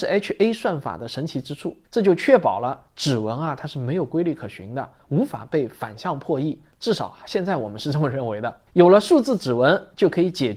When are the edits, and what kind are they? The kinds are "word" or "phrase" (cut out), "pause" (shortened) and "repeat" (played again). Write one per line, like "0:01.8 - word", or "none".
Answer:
0:01.8 - pause
0:08.7 - pause

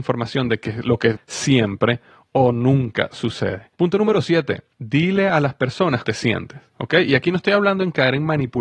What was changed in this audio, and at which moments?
0:01.2 - phrase
0:03.7 - pause
0:04.7 - pause
0:06.0 - word

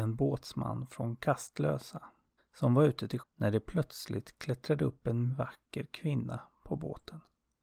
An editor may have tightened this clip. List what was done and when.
0:02.4 - pause
0:03.2 - word
0:05.3 - word

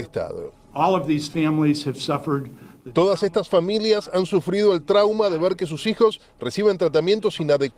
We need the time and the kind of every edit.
none

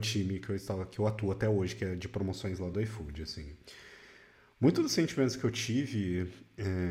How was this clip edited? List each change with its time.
none

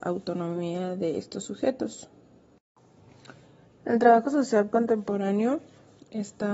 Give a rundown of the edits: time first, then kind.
none

